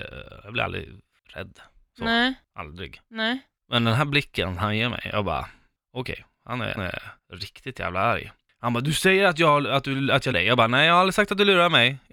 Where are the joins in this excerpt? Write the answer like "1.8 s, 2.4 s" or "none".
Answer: 6.8 s, 10.3 s